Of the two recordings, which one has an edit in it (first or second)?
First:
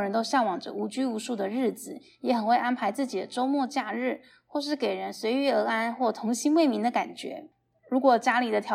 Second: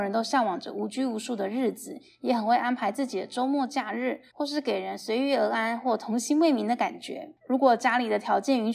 second